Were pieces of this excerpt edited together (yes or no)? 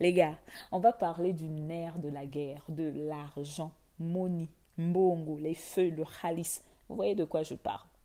no